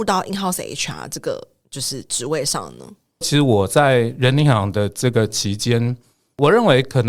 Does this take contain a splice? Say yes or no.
yes